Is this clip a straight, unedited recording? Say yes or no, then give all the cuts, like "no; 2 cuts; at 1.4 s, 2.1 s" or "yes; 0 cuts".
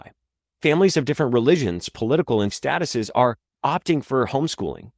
no; 1 cut; at 2.5 s